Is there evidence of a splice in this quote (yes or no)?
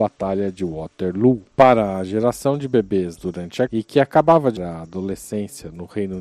yes